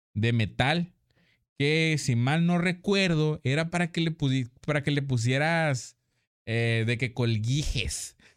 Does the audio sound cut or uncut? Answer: uncut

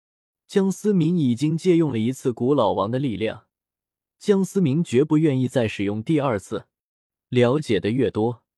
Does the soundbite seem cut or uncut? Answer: uncut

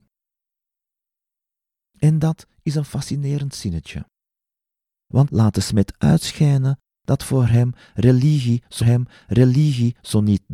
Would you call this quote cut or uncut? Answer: cut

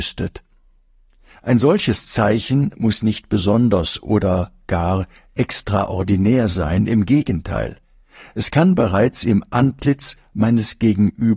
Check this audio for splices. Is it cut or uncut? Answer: uncut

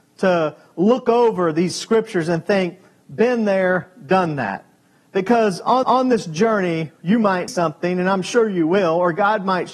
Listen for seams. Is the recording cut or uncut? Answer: cut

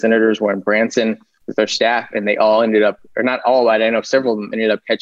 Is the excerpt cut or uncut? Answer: uncut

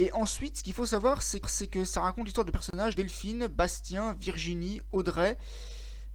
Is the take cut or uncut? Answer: cut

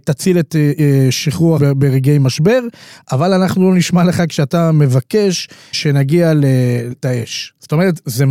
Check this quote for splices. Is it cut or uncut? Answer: cut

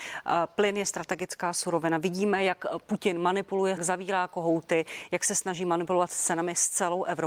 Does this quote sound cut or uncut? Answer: cut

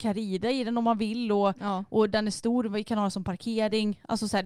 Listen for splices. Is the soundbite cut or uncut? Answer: uncut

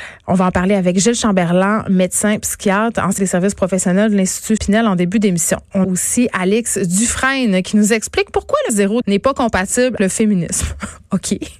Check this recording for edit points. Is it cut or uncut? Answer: cut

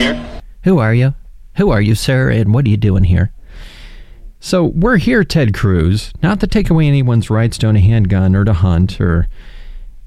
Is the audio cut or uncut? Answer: uncut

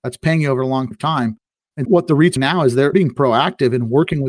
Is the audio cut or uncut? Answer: cut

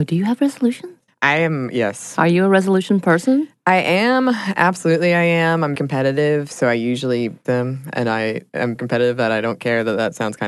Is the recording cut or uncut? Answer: cut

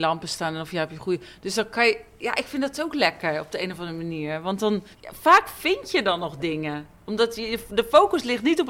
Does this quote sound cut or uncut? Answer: cut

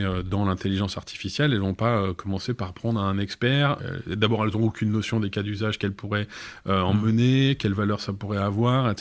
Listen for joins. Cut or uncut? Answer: uncut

